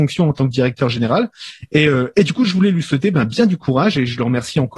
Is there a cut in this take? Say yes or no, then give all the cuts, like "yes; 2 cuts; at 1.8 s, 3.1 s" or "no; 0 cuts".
no; 0 cuts